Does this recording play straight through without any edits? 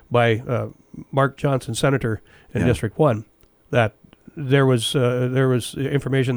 yes; 0 cuts

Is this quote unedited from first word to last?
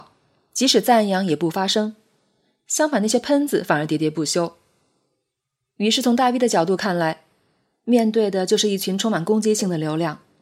yes; 0 cuts

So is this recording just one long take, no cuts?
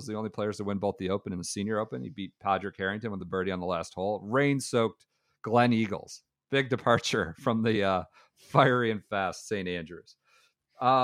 yes; 0 cuts

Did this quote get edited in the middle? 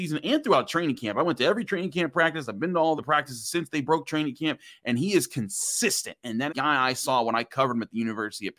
yes; 2 cuts; at 3.0 s, 6.5 s

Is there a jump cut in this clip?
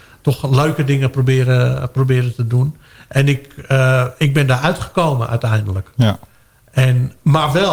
no; 0 cuts

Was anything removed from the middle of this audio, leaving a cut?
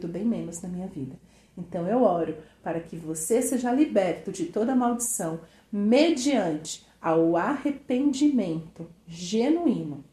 no; 0 cuts

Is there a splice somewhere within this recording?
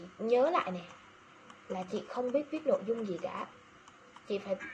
no; 0 cuts

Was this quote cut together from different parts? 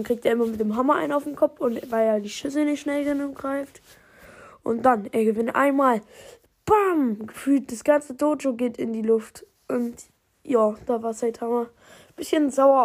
no; 0 cuts

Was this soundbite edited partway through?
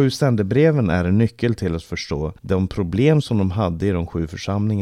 yes; 1 cut; at 2.4 s

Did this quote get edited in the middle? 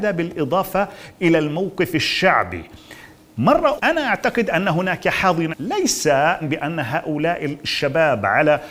yes; 3 cuts; at 3.8 s, 5.5 s, 6.4 s

